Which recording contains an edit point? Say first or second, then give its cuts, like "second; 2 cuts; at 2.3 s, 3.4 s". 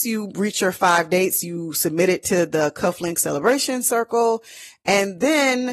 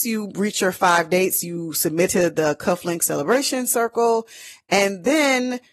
second; 1 cut; at 2.1 s